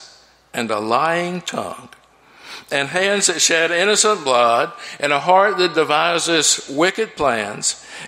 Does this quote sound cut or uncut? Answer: uncut